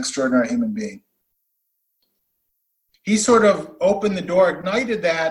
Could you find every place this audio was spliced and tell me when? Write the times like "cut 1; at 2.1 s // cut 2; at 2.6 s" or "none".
none